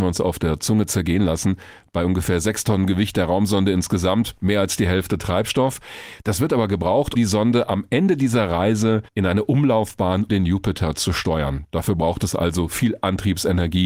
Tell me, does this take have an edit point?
yes; 4 cuts; at 6.2 s, 7.1 s, 9.1 s, 10.3 s

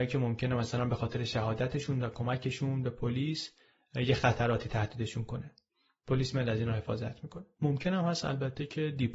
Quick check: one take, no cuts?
yes; 0 cuts

